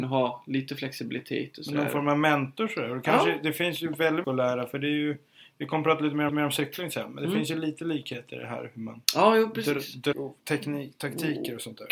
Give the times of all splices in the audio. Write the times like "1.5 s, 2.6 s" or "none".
4.2 s, 6.3 s, 9.0 s, 10.1 s